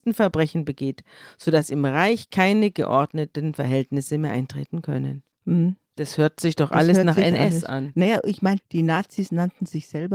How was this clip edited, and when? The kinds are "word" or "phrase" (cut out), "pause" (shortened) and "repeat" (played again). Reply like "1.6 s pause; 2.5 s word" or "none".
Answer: 8.6 s word